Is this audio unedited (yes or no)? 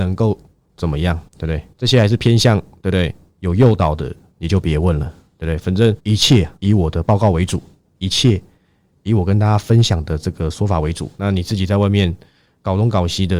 no